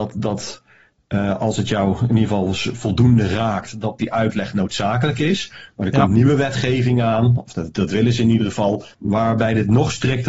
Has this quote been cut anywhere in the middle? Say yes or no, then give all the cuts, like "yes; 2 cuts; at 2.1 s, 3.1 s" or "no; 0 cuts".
yes; 2 cuts; at 4.0 s, 8.9 s